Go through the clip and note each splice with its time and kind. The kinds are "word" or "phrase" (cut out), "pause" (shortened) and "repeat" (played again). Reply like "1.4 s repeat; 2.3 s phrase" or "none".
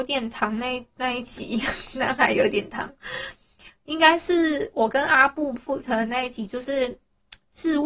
5.8 s word